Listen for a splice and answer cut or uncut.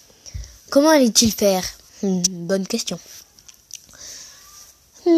cut